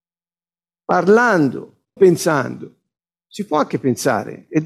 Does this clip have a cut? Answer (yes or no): yes